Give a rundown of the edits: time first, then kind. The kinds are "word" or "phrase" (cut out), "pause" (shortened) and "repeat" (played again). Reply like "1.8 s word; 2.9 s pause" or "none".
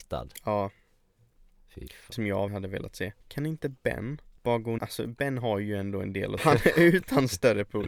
2.1 s phrase; 2.5 s word; 3.2 s pause; 4.4 s pause; 4.8 s word; 6.4 s phrase